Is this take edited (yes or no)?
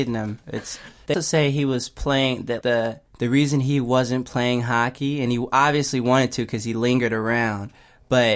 yes